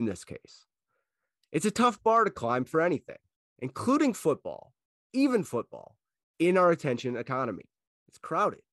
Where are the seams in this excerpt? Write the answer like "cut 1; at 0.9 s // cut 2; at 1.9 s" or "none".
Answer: none